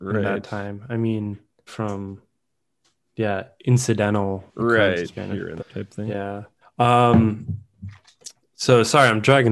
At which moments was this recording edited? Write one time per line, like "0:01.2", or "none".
0:01.7
0:04.5
0:05.0
0:05.6
0:06.6